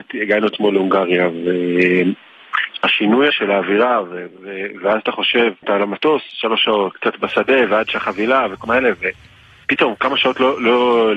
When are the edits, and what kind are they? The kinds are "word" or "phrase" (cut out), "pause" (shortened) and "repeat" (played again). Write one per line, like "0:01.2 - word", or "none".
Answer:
0:03.3 - word
0:05.6 - phrase
0:06.9 - word
0:08.6 - word